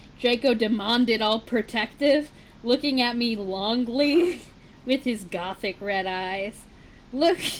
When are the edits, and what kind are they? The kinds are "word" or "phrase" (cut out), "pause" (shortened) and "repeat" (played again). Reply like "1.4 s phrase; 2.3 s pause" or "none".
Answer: none